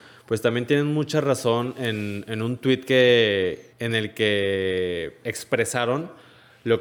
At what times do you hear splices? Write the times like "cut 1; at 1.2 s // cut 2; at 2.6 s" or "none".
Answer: cut 1; at 3.7 s